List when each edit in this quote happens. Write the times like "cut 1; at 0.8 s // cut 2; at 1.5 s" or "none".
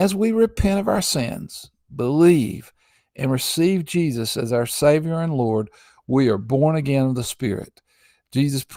none